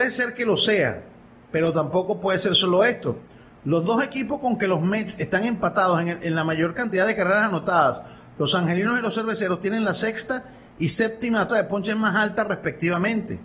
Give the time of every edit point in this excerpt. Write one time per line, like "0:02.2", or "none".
0:11.5